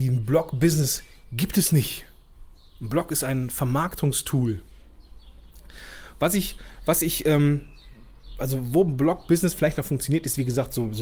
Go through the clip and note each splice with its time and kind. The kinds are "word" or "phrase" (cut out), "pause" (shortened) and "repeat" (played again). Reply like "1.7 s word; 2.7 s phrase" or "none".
none